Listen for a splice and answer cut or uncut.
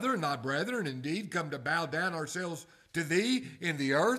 uncut